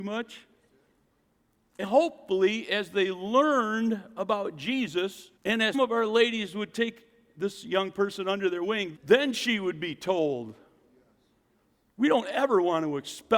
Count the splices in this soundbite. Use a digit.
4